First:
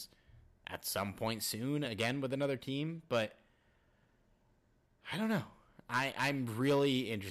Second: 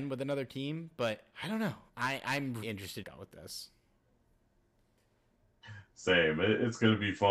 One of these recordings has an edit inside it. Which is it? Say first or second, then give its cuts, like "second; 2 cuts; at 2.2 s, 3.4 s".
second; 4 cuts; at 1.3 s, 1.9 s, 2.6 s, 3.0 s